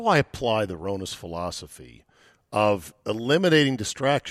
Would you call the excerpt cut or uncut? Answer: uncut